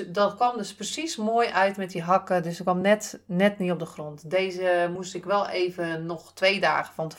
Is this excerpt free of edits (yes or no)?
yes